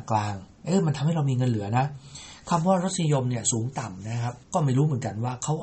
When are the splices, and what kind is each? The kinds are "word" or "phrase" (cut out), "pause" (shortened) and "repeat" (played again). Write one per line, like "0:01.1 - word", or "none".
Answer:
0:04.4 - pause